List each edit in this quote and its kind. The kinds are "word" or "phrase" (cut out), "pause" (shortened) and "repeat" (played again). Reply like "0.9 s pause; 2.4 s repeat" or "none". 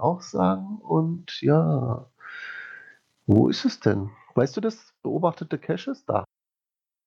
none